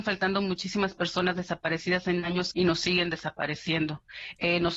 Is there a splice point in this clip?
yes; 1 cut; at 2.5 s

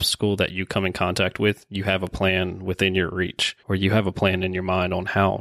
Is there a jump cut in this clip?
yes; 1 cut; at 3.6 s

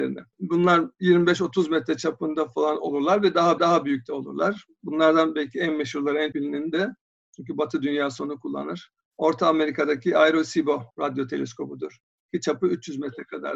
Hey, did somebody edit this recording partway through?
yes; 3 cuts; at 3.6 s, 6.3 s, 10.9 s

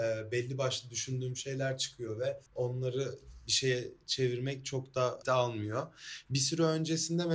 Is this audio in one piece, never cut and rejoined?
no; 2 cuts; at 2.5 s, 5.2 s

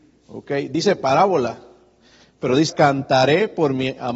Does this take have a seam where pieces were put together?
yes; 1 cut; at 2.7 s

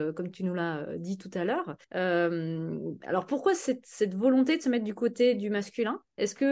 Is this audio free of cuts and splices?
no; 1 cut; at 1.8 s

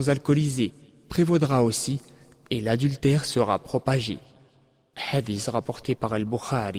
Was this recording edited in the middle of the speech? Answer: no; 0 cuts

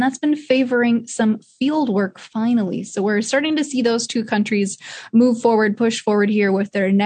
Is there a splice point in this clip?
no; 0 cuts

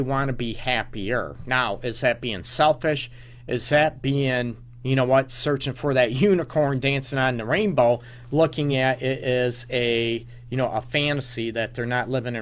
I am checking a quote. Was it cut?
no; 0 cuts

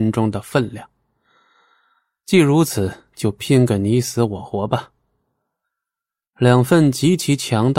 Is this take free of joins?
yes; 0 cuts

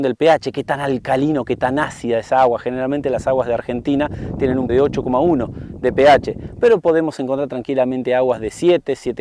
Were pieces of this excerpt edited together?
yes; 1 cut; at 4.7 s

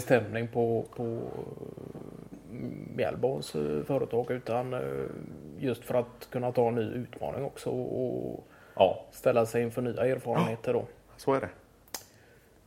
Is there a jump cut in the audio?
no; 0 cuts

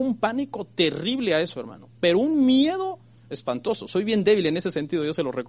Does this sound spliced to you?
no; 0 cuts

